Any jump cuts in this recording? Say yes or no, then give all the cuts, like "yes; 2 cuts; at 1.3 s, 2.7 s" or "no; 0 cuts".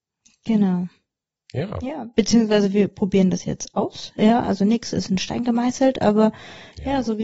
no; 0 cuts